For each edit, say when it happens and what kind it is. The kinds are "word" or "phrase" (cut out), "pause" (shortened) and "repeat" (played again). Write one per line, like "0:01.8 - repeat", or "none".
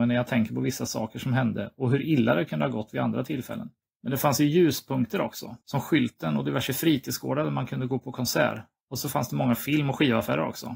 0:03.8 - pause
0:05.6 - pause